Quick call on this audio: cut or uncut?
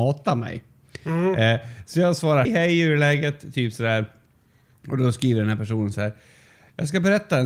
cut